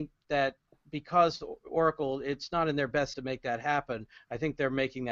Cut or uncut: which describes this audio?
cut